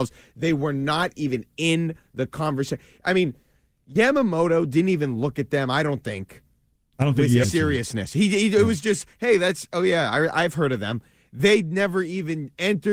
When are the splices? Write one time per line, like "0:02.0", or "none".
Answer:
0:07.4